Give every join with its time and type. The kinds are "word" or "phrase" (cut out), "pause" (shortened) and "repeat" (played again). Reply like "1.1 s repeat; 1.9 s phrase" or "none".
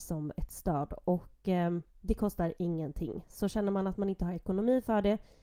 1.9 s pause